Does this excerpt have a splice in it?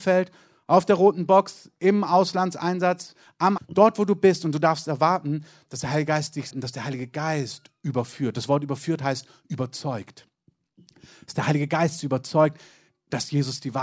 yes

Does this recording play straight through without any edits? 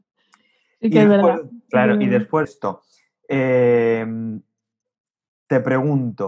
no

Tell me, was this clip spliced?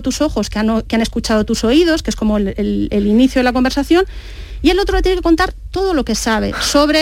no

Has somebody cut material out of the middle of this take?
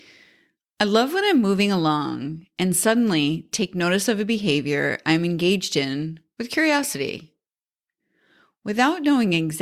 no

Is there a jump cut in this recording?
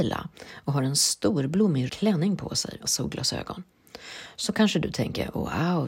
yes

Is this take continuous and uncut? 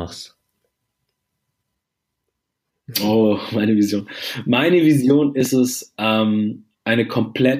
yes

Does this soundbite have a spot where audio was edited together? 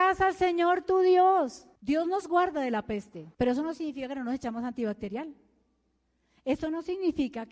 yes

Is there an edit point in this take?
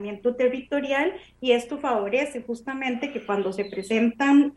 no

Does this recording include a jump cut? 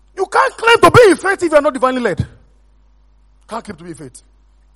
no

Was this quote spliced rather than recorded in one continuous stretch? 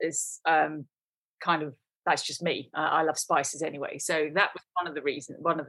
no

